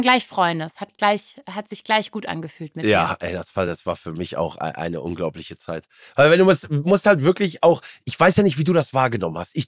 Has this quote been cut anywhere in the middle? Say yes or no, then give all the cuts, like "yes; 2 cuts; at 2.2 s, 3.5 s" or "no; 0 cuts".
no; 0 cuts